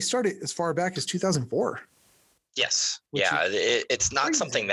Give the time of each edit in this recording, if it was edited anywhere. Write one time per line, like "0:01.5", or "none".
0:03.1